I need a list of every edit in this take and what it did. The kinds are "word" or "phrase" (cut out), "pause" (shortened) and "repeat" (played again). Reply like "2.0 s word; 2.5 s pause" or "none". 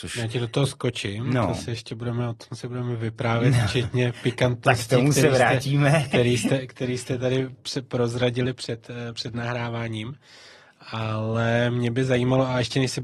none